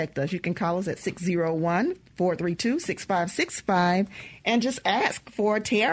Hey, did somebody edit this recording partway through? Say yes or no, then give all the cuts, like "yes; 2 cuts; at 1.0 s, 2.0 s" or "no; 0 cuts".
no; 0 cuts